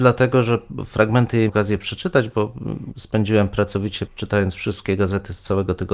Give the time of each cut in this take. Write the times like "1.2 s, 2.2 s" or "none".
1.5 s, 2.9 s, 4.1 s